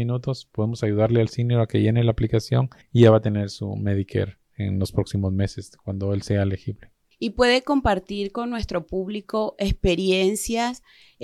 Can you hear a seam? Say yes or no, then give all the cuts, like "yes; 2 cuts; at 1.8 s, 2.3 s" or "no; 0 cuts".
yes; 2 cuts; at 2.8 s, 7.1 s